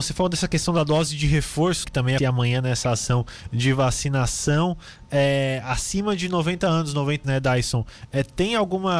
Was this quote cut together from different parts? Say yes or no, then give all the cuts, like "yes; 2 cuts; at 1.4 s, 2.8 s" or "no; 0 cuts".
yes; 3 cuts; at 1.8 s, 2.2 s, 7.2 s